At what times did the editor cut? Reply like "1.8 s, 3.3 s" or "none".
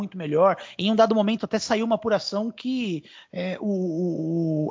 none